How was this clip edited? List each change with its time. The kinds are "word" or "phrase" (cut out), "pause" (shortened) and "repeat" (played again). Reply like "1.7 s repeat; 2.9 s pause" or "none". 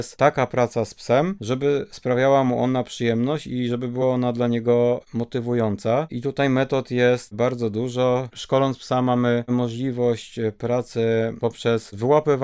none